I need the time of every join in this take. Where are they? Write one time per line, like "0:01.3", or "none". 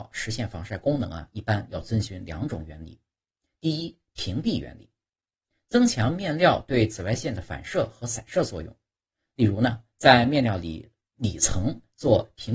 none